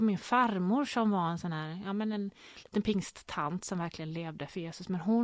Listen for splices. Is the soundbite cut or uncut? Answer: uncut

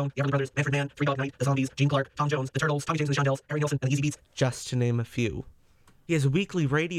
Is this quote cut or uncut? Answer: uncut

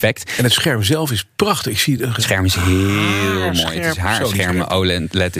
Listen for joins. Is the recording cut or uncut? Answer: uncut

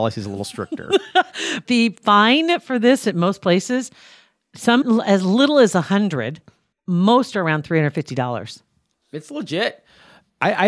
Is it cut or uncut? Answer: cut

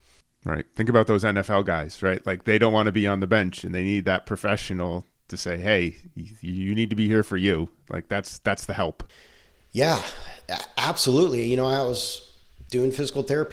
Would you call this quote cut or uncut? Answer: uncut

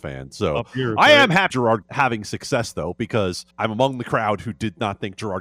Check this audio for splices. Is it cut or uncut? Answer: cut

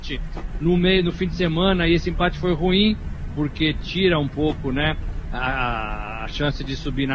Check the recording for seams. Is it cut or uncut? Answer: uncut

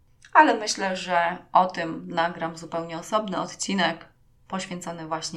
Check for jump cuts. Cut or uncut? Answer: uncut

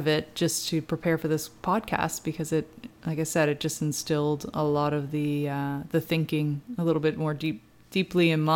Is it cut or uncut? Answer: uncut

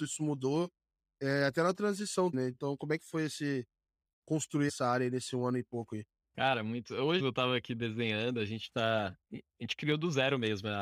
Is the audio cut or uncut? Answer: cut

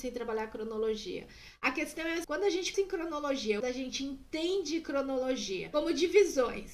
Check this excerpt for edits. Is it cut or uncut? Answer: cut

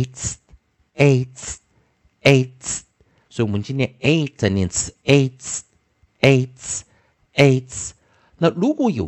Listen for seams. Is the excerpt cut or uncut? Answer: uncut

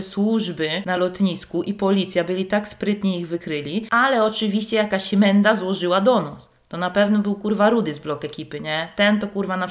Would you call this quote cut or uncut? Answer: uncut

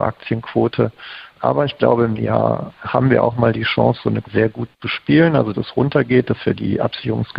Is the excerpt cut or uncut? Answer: cut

